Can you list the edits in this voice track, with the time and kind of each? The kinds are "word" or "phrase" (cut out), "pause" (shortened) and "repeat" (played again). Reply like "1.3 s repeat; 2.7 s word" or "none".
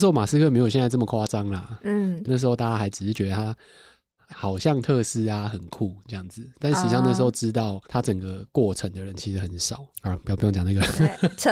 2.2 s phrase; 4.3 s word; 7.8 s pause; 9.9 s pause